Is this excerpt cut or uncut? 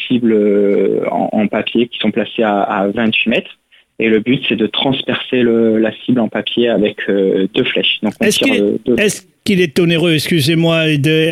uncut